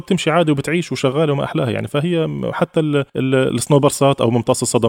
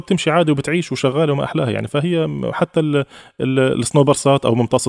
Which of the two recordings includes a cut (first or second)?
first